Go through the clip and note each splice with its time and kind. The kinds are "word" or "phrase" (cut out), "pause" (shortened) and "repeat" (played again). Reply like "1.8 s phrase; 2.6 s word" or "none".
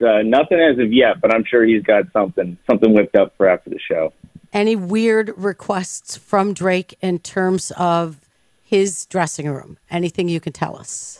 2.6 s pause